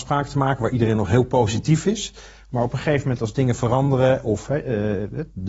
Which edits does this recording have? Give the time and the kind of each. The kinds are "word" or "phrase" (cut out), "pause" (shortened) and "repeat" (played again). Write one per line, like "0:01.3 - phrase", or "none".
none